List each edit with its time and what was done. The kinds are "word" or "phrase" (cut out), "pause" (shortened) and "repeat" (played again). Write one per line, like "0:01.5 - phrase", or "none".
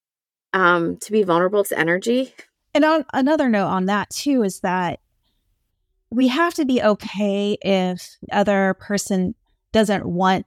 0:01.6 - word
0:03.1 - word
0:08.3 - word